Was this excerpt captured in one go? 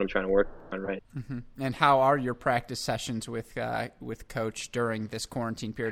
no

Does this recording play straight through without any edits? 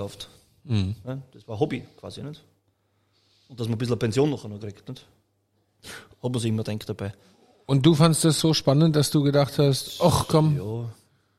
yes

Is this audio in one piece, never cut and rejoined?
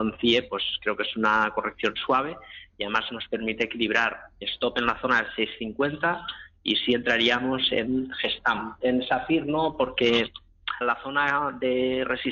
no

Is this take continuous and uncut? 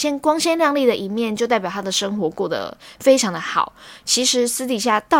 yes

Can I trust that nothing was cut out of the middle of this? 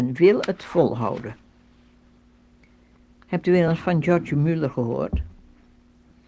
yes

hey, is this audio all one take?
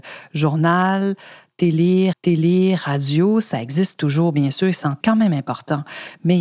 no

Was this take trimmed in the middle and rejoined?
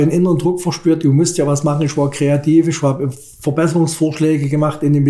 no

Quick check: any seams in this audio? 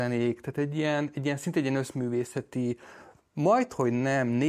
no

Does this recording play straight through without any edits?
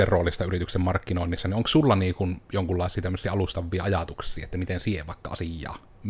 yes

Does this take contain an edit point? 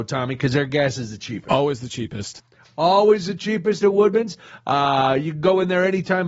no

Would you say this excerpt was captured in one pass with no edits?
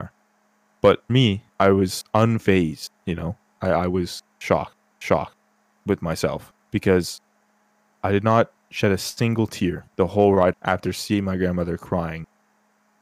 no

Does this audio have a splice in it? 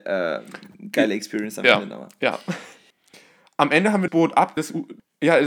yes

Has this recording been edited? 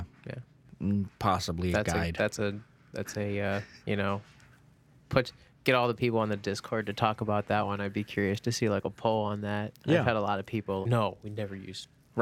yes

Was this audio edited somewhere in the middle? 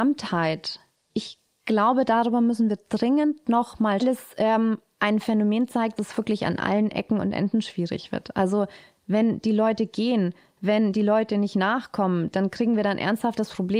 yes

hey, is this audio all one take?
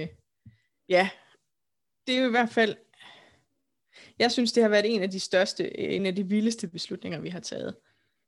yes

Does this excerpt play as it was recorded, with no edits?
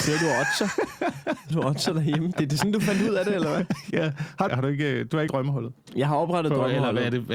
no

